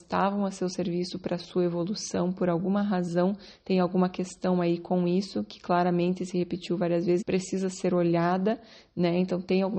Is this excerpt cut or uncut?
cut